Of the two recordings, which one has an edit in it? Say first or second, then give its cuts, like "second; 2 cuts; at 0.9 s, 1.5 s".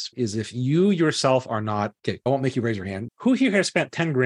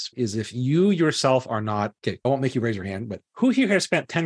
first; 1 cut; at 3.1 s